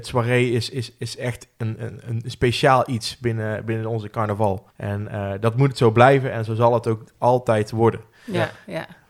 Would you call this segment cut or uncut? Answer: cut